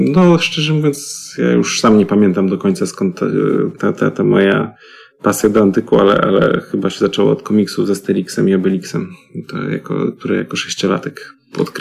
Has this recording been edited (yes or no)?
no